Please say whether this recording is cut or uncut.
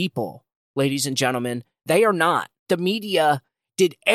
cut